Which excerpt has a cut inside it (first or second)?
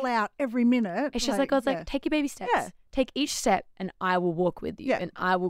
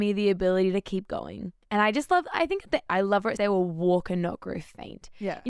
second